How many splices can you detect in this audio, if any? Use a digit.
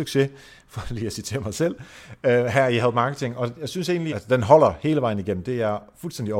1